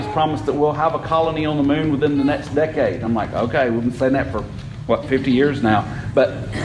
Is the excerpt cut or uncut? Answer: uncut